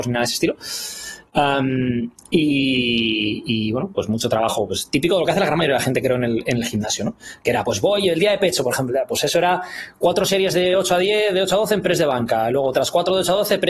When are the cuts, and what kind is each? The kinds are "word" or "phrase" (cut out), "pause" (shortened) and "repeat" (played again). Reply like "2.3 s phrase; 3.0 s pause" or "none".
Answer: none